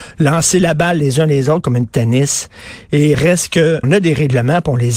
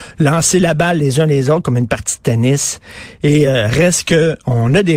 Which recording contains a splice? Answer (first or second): first